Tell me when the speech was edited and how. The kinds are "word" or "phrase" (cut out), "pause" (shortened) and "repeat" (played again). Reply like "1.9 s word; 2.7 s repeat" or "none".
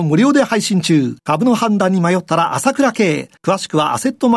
1.2 s pause; 3.4 s pause